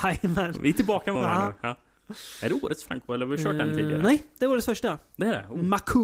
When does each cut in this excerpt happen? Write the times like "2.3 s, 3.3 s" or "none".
1.2 s, 2.9 s